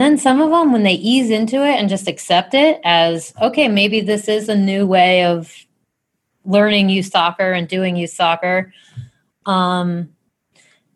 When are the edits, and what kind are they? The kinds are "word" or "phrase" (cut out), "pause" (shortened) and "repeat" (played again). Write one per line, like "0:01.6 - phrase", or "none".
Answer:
none